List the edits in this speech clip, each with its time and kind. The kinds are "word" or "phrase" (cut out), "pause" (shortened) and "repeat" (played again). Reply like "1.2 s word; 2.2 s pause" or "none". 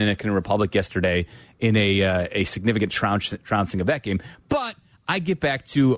none